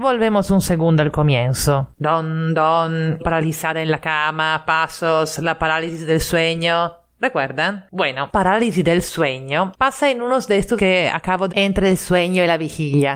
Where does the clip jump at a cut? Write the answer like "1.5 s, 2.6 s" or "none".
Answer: 3.2 s, 8.3 s, 10.8 s, 11.5 s